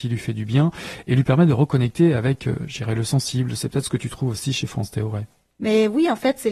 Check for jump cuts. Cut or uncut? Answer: uncut